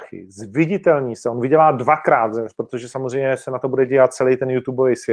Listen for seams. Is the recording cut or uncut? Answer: uncut